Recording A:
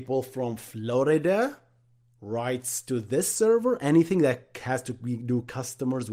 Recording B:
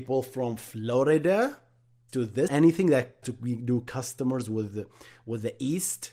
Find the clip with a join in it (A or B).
B